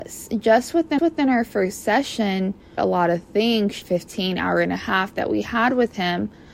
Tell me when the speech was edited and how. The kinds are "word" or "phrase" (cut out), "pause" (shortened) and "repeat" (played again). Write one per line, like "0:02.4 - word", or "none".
0:01.0 - repeat
0:02.8 - phrase
0:03.8 - phrase